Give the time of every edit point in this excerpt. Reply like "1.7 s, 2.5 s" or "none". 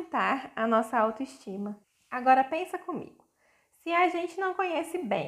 1.8 s